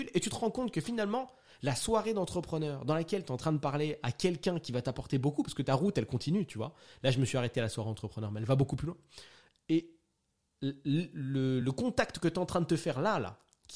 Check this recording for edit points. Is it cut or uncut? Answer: uncut